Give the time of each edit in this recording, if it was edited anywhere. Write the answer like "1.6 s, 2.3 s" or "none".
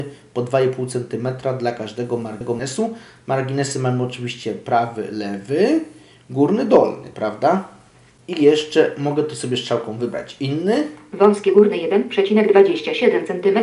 none

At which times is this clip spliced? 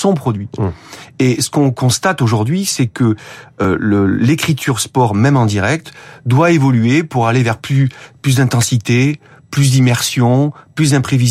none

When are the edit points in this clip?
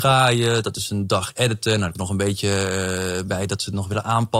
1.9 s

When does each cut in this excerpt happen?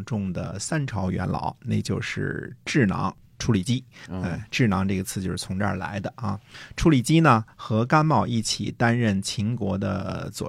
4.1 s

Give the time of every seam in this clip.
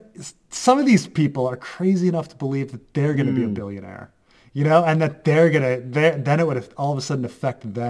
none

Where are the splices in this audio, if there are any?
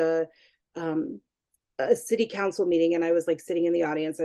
none

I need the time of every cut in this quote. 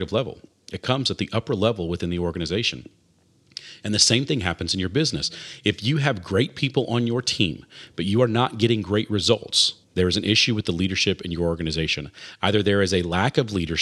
9.8 s

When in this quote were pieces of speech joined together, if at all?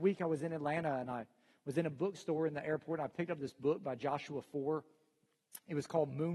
none

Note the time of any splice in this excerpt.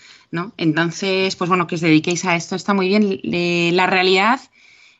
none

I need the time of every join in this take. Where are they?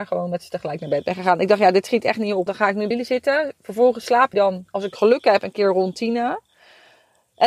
2.5 s, 2.9 s, 4.3 s

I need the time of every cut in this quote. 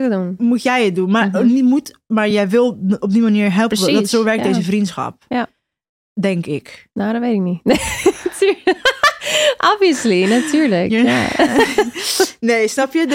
none

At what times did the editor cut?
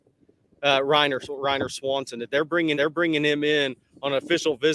1.3 s, 2.7 s

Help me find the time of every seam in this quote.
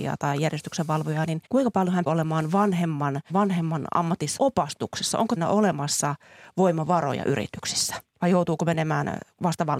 1.5 s, 2.1 s, 3.3 s, 4.4 s, 5.4 s, 8.1 s

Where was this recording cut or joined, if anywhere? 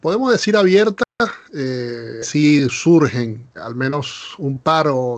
2.2 s, 3.6 s

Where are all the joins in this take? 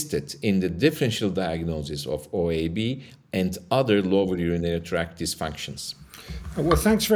none

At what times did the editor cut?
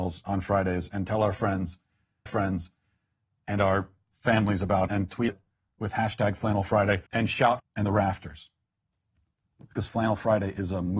2.3 s, 4.9 s, 5.3 s, 7.1 s, 7.6 s

